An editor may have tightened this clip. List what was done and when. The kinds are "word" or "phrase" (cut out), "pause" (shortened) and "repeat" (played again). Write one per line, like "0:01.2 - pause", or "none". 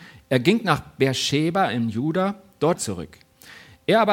0:02.8 - phrase